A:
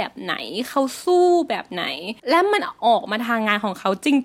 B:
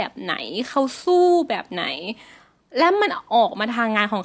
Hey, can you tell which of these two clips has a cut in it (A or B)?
A